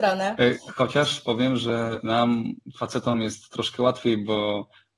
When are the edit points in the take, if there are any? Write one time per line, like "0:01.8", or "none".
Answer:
none